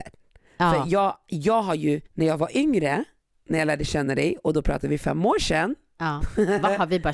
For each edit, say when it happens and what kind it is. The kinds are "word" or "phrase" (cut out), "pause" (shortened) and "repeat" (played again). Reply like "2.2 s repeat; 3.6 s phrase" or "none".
2.1 s pause; 3.2 s pause